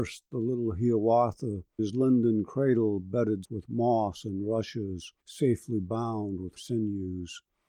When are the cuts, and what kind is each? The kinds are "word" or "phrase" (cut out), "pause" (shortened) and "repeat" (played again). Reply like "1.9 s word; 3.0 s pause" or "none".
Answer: 1.8 s phrase; 3.4 s word; 5.2 s pause; 6.6 s word